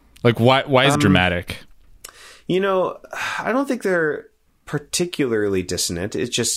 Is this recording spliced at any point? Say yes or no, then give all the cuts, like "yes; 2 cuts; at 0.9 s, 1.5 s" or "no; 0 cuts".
yes; 1 cut; at 1.0 s